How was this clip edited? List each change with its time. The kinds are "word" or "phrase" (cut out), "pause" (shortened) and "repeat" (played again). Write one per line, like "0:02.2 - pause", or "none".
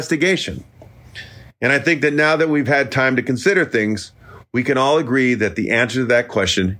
none